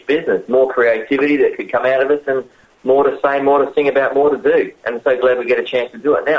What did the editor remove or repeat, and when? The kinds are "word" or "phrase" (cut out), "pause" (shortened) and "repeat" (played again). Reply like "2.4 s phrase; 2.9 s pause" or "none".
none